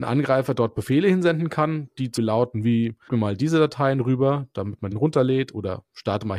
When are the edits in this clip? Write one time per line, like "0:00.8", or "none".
0:02.2
0:03.1
0:04.9